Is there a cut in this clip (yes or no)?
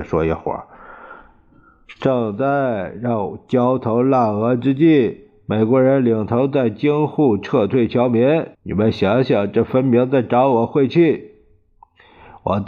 yes